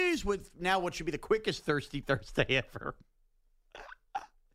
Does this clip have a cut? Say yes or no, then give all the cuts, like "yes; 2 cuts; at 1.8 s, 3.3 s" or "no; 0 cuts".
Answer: no; 0 cuts